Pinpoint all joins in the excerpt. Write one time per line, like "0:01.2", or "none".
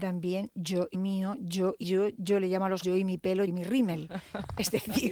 0:00.9
0:01.8
0:02.8
0:03.5